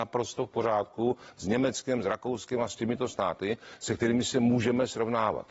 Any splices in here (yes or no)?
no